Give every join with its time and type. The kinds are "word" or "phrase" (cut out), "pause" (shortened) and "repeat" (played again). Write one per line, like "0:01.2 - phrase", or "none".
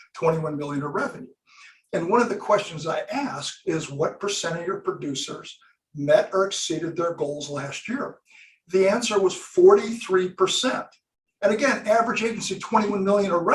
none